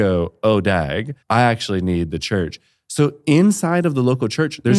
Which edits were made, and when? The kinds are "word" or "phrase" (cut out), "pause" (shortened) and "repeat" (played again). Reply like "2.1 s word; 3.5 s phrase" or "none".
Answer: 1.2 s pause